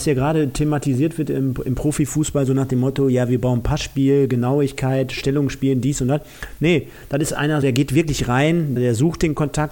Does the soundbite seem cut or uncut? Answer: cut